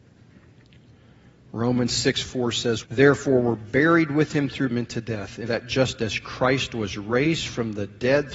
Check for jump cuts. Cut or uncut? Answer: cut